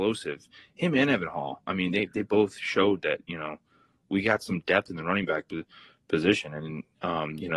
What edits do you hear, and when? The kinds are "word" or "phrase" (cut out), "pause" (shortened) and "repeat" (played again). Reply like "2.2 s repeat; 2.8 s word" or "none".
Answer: none